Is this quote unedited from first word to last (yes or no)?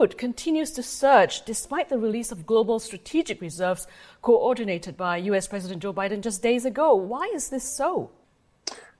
yes